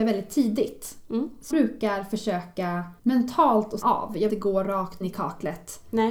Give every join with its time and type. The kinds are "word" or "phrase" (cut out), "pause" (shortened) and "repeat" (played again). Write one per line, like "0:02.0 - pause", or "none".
0:01.5 - word
0:03.0 - pause
0:03.8 - word
0:04.3 - phrase
0:05.0 - word